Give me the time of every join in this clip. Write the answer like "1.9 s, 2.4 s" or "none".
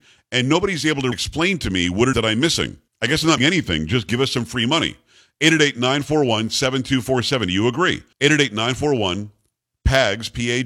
1.1 s, 2.1 s, 2.9 s, 3.4 s, 8.1 s

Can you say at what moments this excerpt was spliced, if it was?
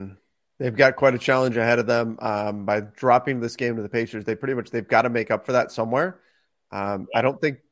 none

